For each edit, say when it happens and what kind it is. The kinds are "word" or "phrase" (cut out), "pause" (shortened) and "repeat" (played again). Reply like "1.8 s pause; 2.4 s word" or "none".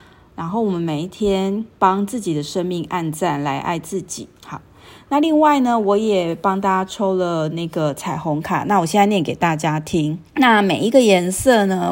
1.7 s pause; 4.4 s pause; 10.3 s pause